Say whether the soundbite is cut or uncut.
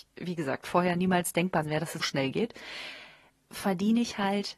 cut